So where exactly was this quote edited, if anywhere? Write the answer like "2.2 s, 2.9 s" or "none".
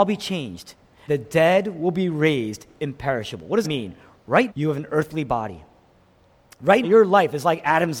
1.1 s, 3.6 s, 4.5 s, 6.8 s